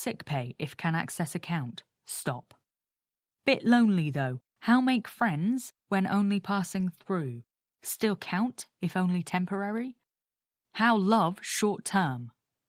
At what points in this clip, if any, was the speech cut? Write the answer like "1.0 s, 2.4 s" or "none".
none